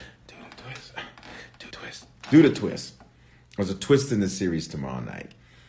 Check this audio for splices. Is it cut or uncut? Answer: cut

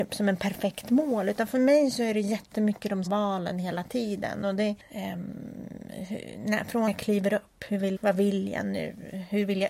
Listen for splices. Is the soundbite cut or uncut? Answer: cut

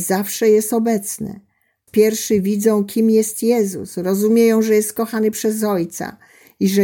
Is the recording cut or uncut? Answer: cut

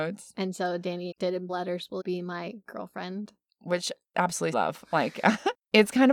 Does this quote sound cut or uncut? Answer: cut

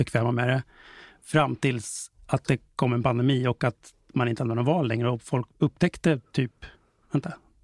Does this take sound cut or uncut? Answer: cut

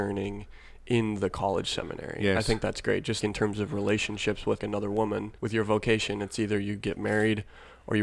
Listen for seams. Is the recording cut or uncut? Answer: cut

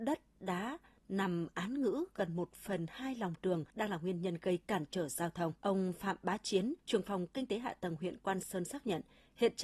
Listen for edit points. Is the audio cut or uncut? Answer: cut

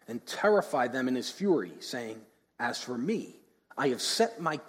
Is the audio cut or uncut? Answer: uncut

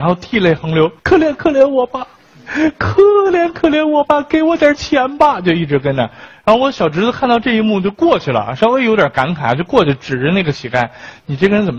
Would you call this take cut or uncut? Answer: cut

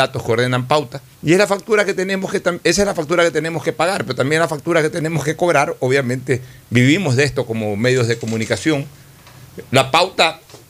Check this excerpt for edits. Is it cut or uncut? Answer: cut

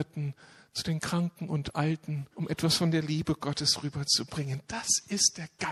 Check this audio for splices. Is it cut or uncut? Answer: cut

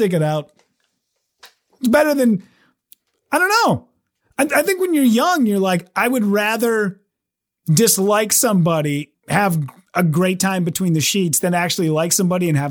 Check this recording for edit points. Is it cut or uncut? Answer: cut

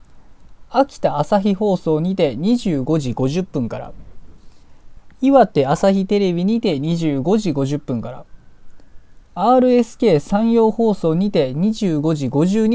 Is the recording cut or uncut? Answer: uncut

